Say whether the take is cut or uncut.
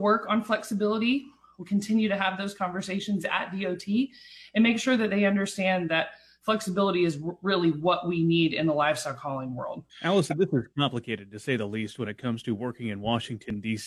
cut